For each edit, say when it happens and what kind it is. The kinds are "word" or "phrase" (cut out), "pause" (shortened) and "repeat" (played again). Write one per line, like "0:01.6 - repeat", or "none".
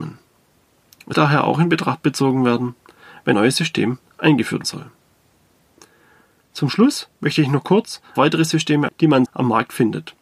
0:01.1 - word
0:03.3 - word
0:04.6 - word
0:08.2 - word
0:08.9 - word
0:09.3 - word